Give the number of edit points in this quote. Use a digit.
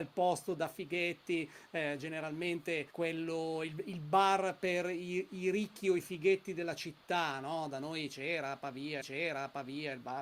2